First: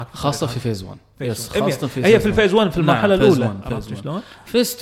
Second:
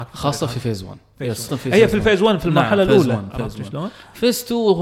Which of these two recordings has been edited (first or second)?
second